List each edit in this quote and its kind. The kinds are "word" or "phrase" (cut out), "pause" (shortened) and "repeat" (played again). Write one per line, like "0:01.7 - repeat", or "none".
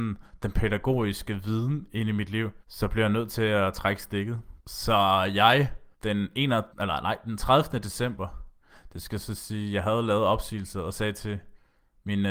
0:02.6 - pause
0:04.6 - pause
0:05.9 - pause
0:06.7 - pause